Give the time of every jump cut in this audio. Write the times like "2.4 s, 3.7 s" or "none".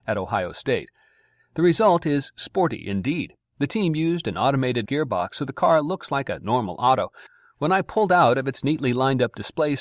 4.8 s